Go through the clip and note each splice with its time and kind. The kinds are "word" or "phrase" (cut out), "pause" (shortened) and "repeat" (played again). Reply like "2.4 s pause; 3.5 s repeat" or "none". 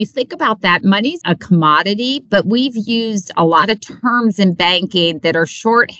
1.2 s word